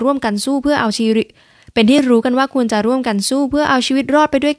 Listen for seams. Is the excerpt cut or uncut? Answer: uncut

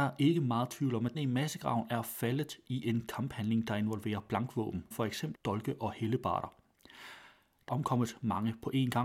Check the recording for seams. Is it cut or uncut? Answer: cut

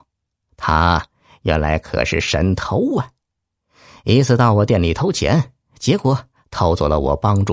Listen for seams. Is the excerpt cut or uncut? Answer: uncut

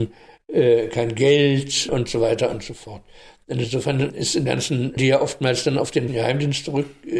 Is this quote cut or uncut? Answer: cut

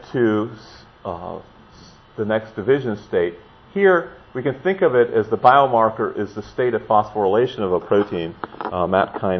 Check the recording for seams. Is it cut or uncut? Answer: uncut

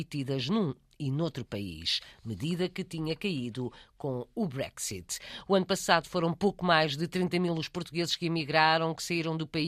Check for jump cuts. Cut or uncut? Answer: uncut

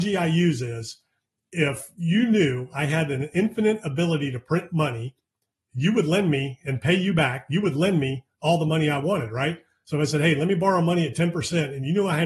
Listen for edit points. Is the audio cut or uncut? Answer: uncut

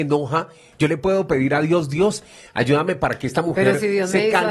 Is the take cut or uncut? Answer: uncut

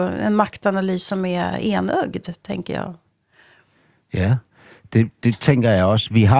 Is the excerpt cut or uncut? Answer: uncut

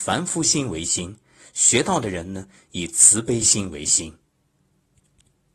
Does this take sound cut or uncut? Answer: uncut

